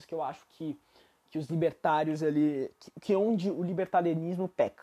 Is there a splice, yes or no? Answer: no